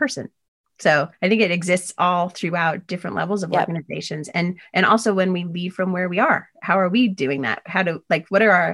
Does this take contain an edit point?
yes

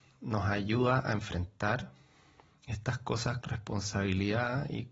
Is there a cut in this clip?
yes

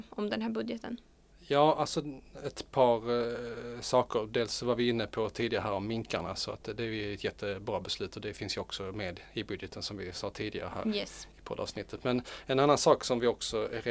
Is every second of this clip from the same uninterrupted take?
yes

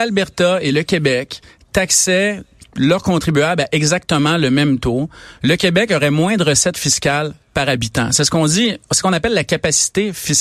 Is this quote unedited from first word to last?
yes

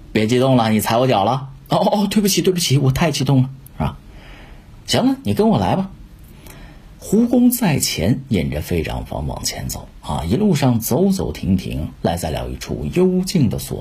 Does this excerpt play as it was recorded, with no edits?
yes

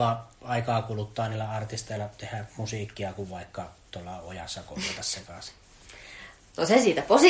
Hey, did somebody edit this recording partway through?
no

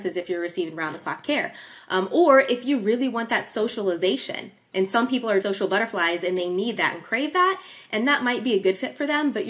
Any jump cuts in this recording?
yes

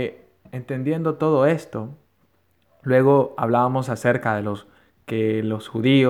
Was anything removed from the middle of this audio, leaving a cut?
no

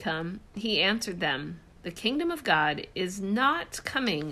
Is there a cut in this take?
no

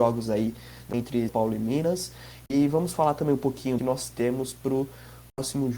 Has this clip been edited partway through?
yes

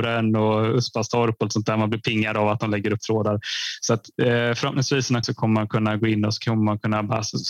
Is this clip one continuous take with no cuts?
no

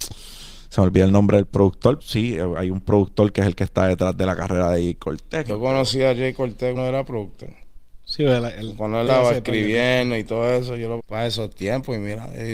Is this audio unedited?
no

